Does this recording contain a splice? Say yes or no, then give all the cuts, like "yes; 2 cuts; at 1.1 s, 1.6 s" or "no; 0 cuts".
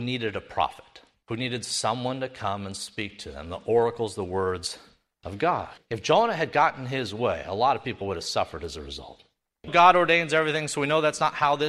yes; 2 cuts; at 5.8 s, 9.7 s